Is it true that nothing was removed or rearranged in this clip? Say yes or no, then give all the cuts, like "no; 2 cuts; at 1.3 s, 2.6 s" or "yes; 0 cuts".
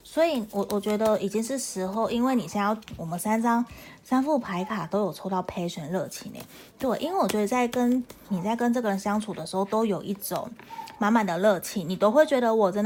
yes; 0 cuts